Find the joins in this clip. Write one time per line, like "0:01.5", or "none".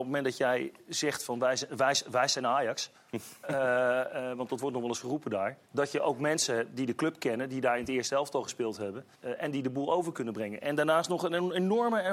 0:05.6
0:09.1